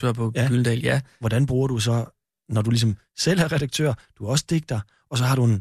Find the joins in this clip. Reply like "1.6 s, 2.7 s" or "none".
none